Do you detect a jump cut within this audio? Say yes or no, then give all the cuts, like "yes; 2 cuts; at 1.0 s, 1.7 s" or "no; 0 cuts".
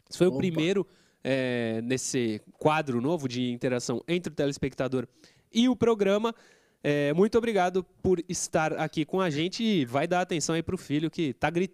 no; 0 cuts